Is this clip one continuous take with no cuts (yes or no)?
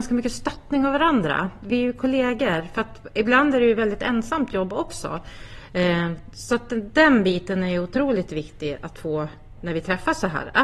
yes